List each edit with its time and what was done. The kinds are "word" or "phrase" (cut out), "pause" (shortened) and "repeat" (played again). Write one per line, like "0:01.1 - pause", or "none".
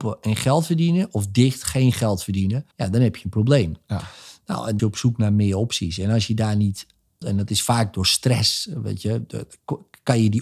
0:02.7 - pause
0:04.8 - phrase
0:07.2 - word